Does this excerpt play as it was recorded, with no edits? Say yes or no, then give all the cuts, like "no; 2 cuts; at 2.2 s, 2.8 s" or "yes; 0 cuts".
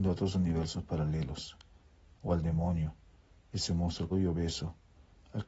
no; 1 cut; at 4.1 s